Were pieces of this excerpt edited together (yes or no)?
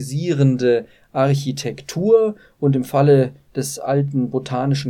no